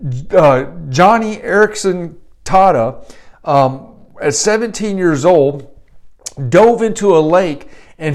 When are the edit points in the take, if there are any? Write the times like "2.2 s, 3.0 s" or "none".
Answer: none